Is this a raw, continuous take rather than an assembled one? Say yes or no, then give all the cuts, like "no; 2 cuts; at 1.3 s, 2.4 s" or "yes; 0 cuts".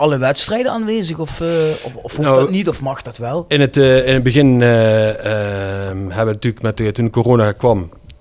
yes; 0 cuts